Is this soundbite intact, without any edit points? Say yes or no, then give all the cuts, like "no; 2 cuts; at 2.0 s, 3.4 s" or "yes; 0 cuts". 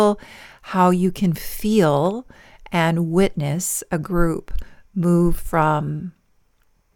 yes; 0 cuts